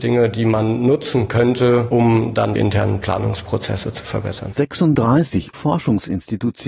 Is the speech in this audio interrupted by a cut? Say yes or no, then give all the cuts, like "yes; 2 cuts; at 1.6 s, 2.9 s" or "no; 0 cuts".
yes; 2 cuts; at 2.6 s, 5.5 s